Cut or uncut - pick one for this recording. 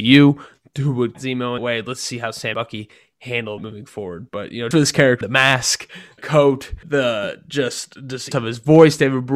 cut